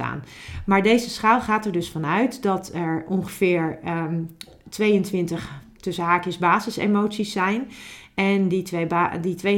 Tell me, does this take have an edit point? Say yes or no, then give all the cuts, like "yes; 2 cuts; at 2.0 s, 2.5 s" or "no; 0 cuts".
no; 0 cuts